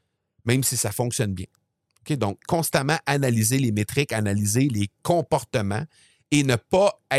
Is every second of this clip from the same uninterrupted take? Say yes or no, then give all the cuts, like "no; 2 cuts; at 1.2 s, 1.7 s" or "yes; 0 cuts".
no; 1 cut; at 2.4 s